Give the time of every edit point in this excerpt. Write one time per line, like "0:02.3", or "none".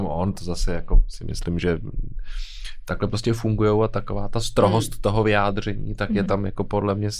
none